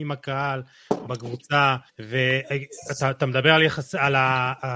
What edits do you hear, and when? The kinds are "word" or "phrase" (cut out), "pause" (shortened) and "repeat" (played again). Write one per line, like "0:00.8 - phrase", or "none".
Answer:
0:01.9 - pause

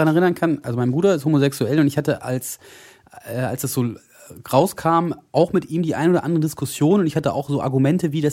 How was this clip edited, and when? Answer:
none

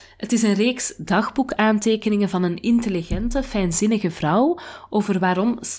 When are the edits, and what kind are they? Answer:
none

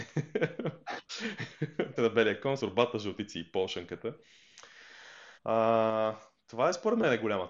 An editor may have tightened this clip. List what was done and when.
0:02.0 - word
0:02.6 - word
0:05.4 - pause

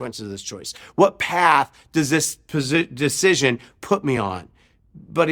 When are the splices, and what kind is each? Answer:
none

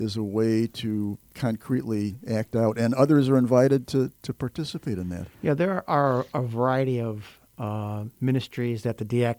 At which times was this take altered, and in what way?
0:05.3 - pause

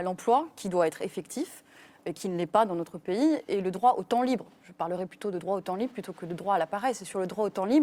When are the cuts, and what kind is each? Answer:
none

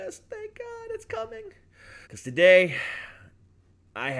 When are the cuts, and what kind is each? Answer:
0:02.0 - pause

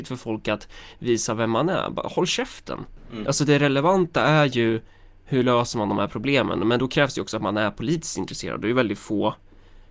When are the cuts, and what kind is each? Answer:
none

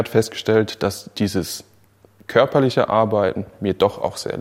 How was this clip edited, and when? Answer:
none

